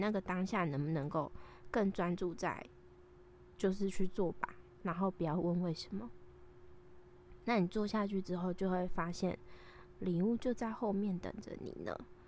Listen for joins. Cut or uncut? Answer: cut